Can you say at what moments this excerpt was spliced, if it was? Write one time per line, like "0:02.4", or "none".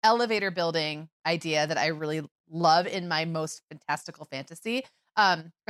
0:01.1